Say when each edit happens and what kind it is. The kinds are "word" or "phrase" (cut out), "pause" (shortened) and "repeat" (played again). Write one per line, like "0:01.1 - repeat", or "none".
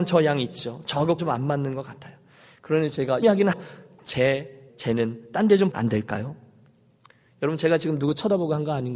0:01.2 - word
0:02.9 - word
0:03.2 - word
0:03.5 - word
0:04.7 - word
0:05.7 - word